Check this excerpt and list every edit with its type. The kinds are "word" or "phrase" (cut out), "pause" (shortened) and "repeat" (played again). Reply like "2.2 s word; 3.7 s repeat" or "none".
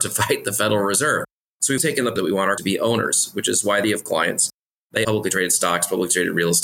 1.8 s word; 2.2 s word; 2.6 s word; 3.8 s word; 5.0 s word